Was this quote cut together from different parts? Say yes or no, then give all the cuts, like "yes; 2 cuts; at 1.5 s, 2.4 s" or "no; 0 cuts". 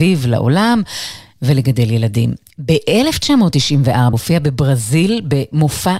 yes; 1 cut; at 4.1 s